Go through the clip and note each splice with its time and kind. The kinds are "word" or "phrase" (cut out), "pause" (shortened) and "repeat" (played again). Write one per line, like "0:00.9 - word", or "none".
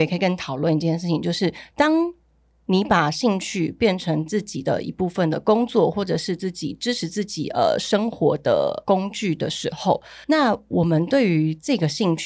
0:10.2 - pause